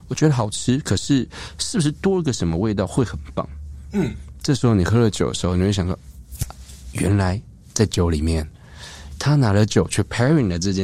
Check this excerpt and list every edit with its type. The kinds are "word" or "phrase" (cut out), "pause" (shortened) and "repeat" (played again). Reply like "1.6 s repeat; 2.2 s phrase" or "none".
none